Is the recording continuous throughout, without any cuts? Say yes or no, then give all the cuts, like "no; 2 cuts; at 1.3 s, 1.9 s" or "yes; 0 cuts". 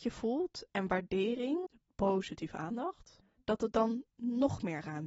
yes; 0 cuts